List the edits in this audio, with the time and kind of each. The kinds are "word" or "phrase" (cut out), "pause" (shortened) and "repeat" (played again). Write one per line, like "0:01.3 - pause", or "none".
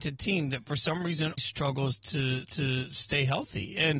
0:01.4 - word
0:02.4 - repeat